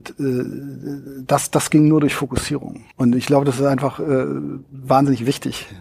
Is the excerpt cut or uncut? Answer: cut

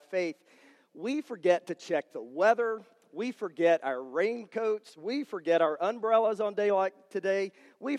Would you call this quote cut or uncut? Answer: uncut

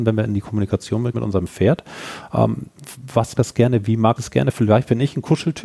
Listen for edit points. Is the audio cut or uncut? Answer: cut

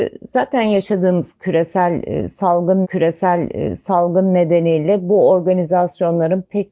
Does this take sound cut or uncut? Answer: cut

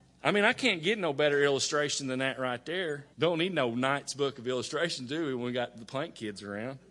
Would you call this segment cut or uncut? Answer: cut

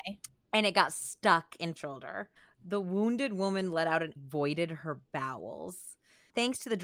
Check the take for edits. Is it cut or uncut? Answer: cut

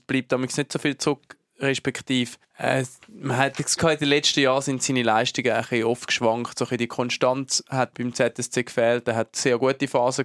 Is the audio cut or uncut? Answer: cut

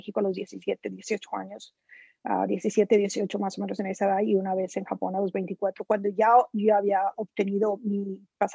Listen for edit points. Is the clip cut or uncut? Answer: uncut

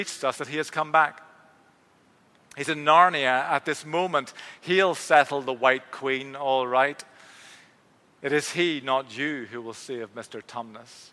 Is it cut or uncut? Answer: uncut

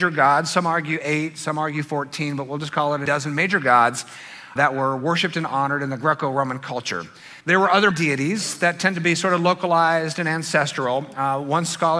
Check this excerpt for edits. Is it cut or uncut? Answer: cut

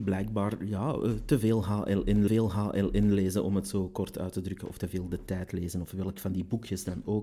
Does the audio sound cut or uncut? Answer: cut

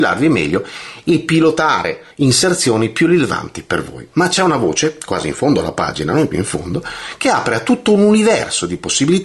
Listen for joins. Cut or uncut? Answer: cut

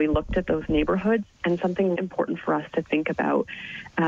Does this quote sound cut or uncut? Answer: cut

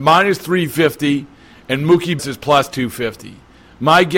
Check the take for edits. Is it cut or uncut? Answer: cut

